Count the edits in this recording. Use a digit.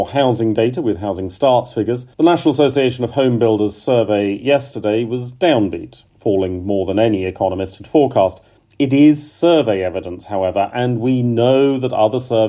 3